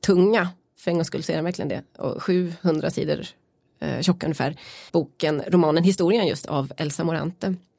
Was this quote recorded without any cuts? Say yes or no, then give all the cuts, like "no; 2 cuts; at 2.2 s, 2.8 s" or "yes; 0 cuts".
no; 1 cut; at 4.9 s